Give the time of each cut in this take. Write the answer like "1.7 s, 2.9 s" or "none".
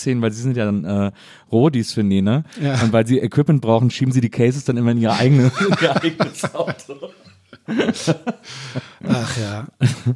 none

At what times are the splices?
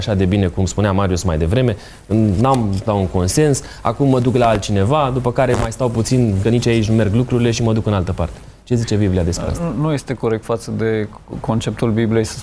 2.9 s, 6.4 s

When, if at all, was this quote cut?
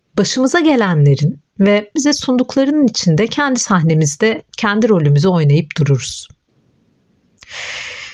2.0 s

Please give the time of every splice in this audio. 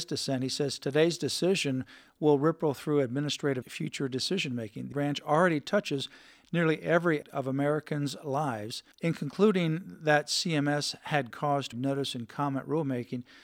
3.6 s, 4.9 s, 7.2 s, 8.9 s, 11.3 s, 11.7 s

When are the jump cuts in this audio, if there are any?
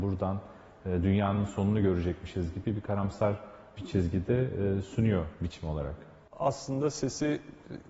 none

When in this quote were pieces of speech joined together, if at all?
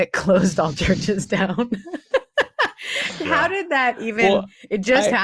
none

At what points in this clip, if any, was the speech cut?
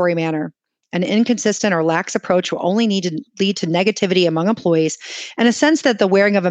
none

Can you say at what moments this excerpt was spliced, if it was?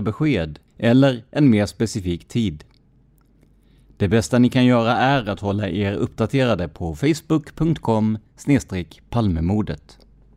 none

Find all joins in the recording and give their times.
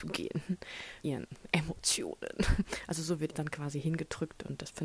1.0 s, 3.3 s

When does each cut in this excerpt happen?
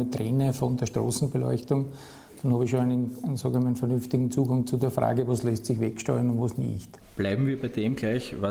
none

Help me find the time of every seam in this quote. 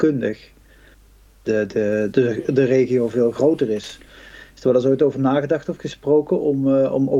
2.1 s

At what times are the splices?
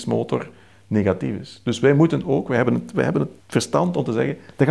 3.4 s

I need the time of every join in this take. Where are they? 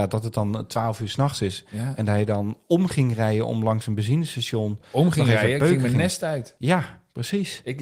none

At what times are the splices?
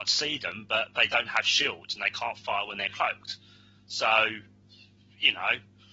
none

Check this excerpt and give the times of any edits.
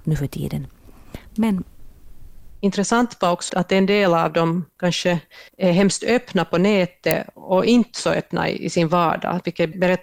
3.5 s, 5.5 s

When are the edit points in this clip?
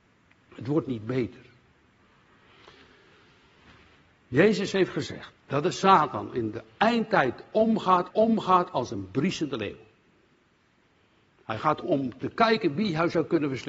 5.4 s, 8.1 s, 11.8 s

